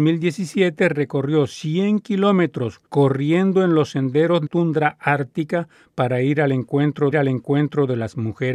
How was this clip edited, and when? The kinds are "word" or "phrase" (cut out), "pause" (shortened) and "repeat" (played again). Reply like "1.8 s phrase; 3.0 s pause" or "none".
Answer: 2.9 s pause; 4.5 s word; 7.1 s repeat